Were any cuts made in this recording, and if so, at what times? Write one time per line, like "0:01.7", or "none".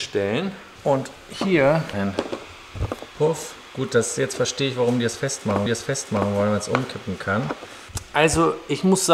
0:01.9
0:03.1
0:05.7